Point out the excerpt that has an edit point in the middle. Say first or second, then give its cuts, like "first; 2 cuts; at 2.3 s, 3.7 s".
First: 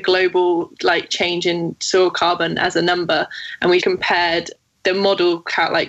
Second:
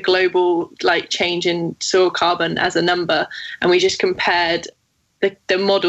first; 2 cuts; at 3.8 s, 4.8 s